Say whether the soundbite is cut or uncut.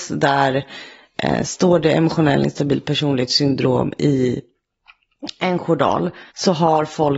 cut